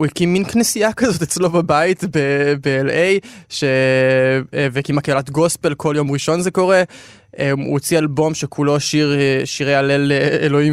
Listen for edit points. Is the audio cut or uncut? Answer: uncut